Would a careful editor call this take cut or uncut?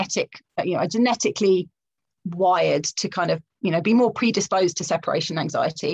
uncut